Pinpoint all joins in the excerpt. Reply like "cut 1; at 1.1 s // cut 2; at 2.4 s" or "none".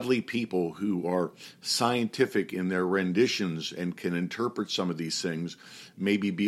none